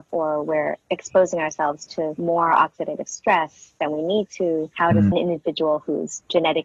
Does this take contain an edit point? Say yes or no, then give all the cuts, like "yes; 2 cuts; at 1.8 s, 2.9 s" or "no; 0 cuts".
yes; 1 cut; at 5.1 s